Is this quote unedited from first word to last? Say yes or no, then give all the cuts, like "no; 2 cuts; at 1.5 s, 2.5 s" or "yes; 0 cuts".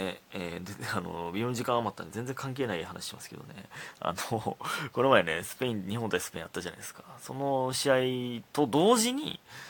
yes; 0 cuts